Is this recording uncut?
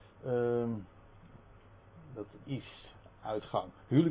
no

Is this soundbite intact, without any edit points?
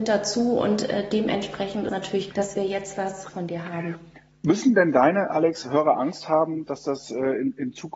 no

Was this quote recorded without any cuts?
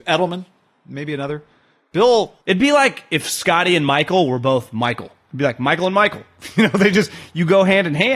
no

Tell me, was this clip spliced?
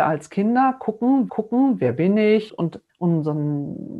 yes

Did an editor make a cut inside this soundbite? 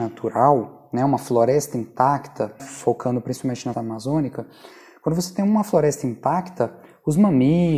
yes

